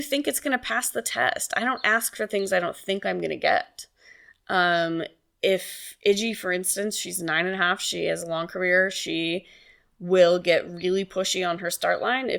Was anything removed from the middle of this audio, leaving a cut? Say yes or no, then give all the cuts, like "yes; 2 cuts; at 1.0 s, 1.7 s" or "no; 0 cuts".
no; 0 cuts